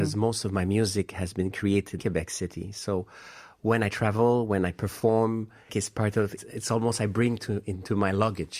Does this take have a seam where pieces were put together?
yes; 4 cuts; at 2.0 s, 5.7 s, 6.4 s, 7.4 s

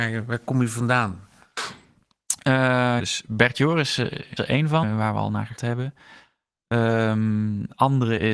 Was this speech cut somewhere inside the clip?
yes; 4 cuts; at 3.0 s, 4.4 s, 4.8 s, 5.6 s

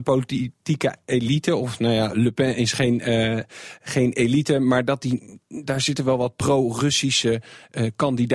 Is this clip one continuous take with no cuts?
yes; 0 cuts

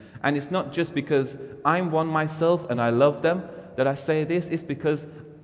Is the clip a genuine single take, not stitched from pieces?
yes; 0 cuts

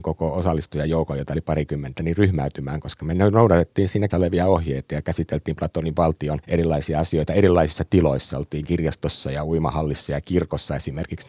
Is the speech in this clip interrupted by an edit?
yes; 2 cuts; at 4.1 s, 6.4 s

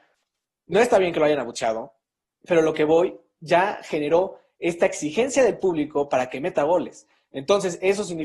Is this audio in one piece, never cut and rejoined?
yes; 0 cuts

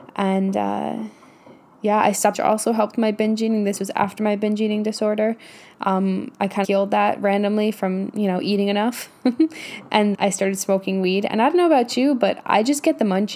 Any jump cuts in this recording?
yes; 3 cuts; at 2.3 s, 6.6 s, 10.1 s

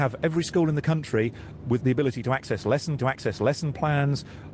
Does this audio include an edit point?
yes; 2 cuts; at 1.8 s, 3.0 s

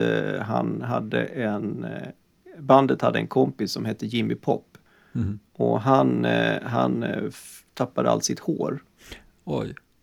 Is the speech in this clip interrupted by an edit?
yes; 1 cut; at 5.5 s

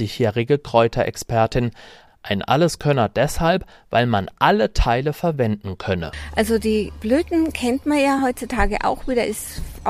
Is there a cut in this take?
no; 0 cuts

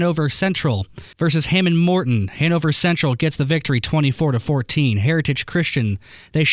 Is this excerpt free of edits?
no; 1 cut; at 1.1 s

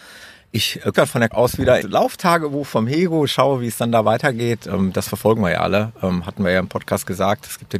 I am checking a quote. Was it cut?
yes; 3 cuts; at 0.9 s, 1.3 s, 1.8 s

